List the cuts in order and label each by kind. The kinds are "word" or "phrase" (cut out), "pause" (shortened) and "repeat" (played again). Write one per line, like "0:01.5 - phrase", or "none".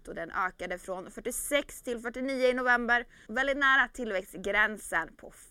0:03.3 - word